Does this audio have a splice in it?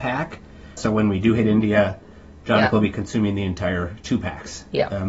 no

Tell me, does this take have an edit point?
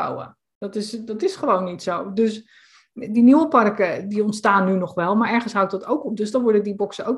no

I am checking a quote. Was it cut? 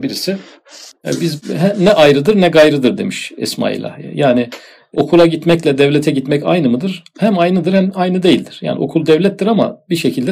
no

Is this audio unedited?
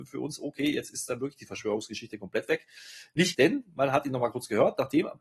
no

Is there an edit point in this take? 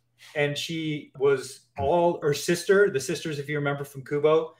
yes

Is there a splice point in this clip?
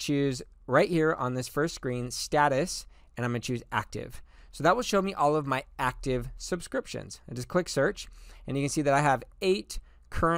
no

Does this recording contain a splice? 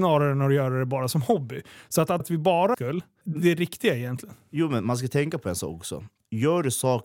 yes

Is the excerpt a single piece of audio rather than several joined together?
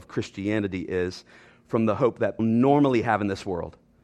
no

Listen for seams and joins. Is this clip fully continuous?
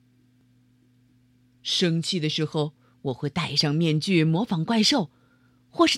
yes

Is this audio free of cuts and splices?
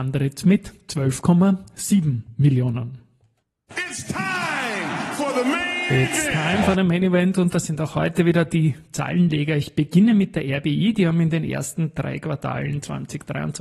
yes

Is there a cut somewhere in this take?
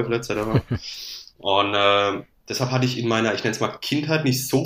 no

